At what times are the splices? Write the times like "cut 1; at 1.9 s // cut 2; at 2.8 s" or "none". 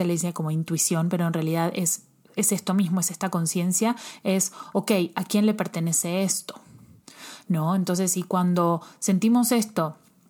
none